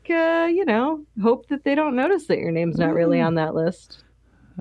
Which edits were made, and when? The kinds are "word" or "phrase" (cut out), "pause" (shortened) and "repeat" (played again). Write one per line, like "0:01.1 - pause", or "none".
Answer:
none